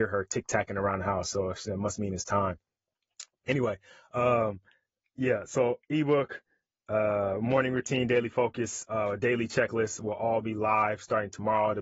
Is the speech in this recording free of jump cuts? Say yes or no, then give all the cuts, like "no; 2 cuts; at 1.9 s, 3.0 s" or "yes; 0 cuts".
yes; 0 cuts